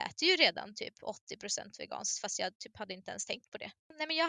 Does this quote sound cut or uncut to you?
uncut